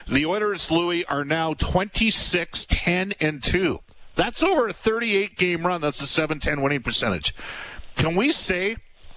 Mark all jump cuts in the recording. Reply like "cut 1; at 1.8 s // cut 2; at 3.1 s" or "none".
none